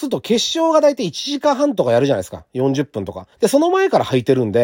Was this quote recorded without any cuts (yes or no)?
no